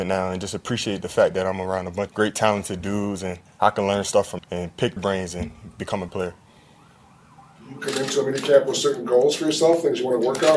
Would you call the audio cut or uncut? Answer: cut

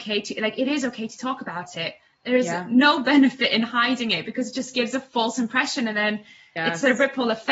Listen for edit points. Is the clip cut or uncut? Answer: uncut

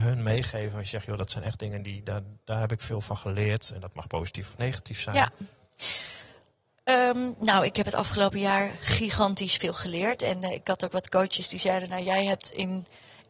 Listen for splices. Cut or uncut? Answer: uncut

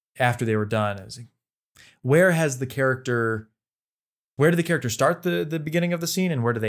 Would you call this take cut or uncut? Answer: uncut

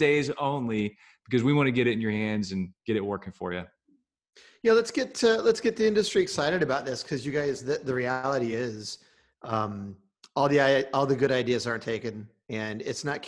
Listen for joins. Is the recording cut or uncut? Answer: uncut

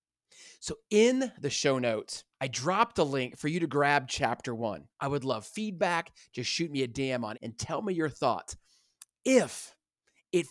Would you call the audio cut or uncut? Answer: cut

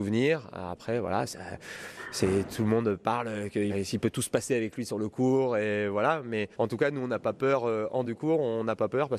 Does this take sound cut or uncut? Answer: cut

